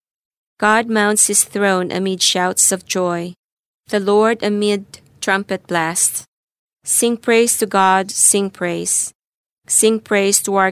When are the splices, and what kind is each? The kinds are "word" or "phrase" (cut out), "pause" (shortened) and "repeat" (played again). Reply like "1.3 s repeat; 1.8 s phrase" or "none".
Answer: none